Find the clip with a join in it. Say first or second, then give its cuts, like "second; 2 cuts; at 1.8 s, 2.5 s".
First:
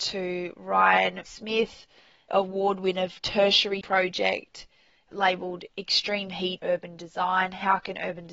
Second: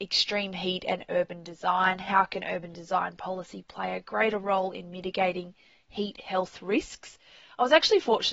first; 6 cuts; at 1.3 s, 2.3 s, 3.2 s, 3.8 s, 5.1 s, 6.6 s